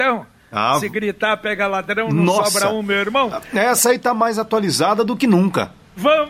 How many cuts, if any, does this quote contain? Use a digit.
0